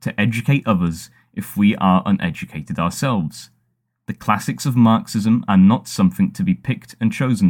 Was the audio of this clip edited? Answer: no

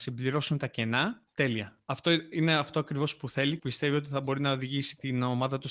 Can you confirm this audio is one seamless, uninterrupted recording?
no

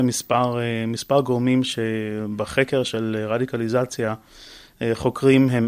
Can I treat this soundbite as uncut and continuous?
yes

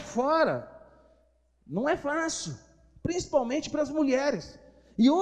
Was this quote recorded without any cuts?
yes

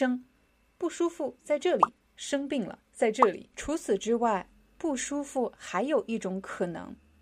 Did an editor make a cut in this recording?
yes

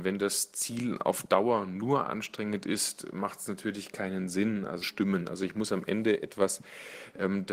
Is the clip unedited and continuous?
no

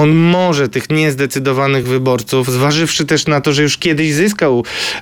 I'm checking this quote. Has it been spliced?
no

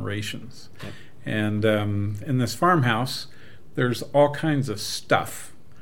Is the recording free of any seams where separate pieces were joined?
yes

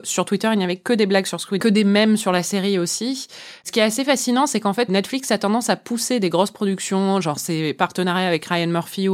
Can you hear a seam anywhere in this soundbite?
yes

